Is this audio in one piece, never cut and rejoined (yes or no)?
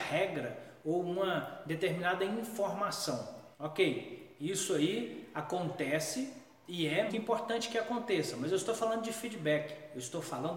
no